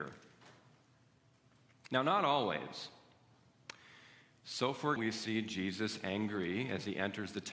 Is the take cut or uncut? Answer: cut